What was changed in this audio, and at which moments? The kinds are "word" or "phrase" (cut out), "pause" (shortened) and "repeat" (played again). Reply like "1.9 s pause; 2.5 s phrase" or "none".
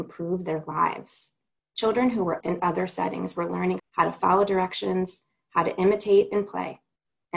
2.4 s word; 3.8 s phrase